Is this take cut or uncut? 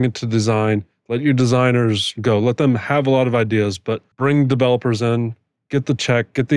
cut